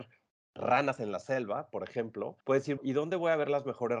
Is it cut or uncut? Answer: cut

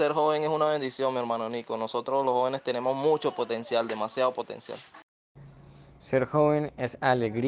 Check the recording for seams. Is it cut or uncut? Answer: uncut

